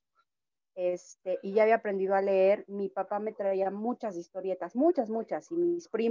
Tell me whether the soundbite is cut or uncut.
uncut